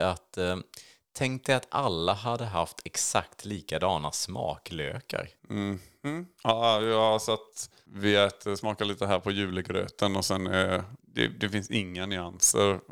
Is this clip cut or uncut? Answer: cut